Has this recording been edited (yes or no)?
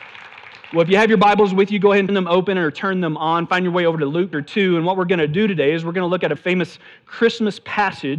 yes